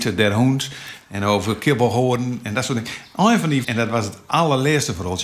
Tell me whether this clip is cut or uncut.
cut